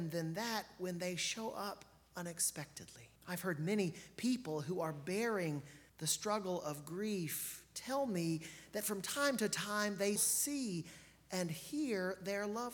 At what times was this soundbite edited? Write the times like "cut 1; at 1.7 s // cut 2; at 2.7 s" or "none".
cut 1; at 3.2 s // cut 2; at 5.9 s // cut 3; at 10.2 s